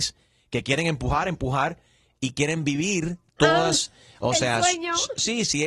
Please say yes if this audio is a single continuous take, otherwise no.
yes